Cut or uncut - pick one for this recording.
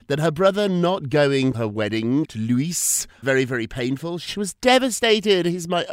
cut